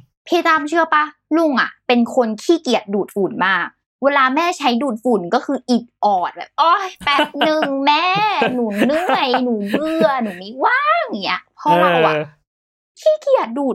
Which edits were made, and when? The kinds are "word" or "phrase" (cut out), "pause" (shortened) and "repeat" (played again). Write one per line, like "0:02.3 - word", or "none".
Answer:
none